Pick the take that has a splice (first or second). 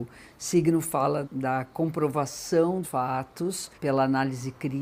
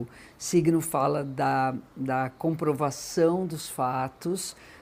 first